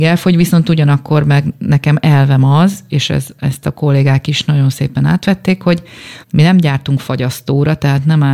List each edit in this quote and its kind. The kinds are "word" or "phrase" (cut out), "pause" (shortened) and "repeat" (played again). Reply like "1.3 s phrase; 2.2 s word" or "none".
6.2 s pause